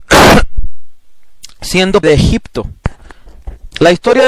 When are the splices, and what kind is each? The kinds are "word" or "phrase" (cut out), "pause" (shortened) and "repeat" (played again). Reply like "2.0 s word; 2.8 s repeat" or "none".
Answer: 2.0 s word